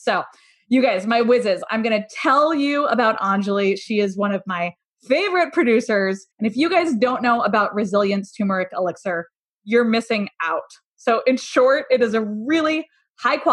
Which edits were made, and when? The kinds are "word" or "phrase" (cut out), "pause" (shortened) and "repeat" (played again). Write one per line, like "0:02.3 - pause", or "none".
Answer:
0:06.3 - pause